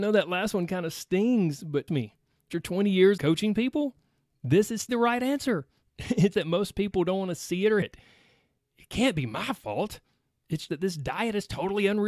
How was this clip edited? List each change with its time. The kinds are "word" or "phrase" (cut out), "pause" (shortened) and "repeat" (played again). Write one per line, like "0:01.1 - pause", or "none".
0:01.9 - word
0:02.5 - word
0:03.2 - word
0:04.9 - word
0:06.3 - word
0:07.8 - word
0:10.7 - word